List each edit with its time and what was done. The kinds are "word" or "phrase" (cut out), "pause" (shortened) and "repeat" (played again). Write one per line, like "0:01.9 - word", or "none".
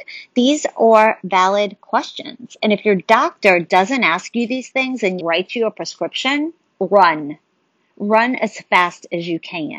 0:05.2 - word